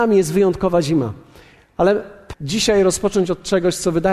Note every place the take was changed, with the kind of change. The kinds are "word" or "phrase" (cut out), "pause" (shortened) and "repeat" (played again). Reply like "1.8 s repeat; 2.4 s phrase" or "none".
2.3 s word